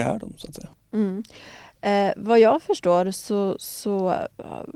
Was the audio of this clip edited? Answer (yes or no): no